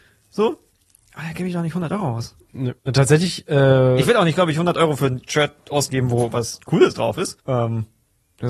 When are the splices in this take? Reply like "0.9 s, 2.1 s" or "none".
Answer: 2.8 s, 7.4 s